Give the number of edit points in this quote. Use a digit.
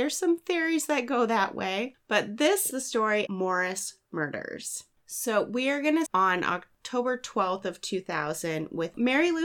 4